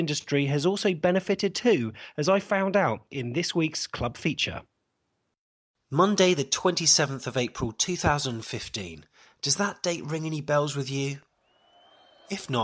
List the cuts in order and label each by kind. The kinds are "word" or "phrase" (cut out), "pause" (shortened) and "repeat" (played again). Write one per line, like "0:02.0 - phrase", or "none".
none